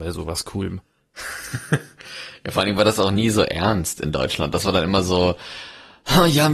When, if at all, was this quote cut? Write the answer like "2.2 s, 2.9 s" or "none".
none